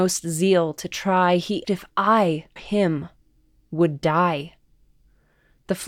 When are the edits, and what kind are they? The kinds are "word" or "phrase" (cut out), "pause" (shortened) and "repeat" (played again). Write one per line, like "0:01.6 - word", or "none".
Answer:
0:01.6 - word
0:02.6 - word